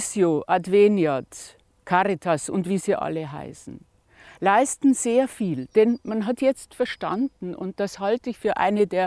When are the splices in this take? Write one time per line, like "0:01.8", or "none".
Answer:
none